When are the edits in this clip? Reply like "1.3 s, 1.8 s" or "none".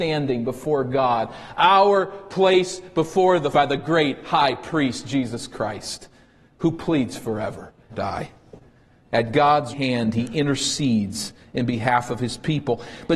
3.5 s, 7.9 s, 9.7 s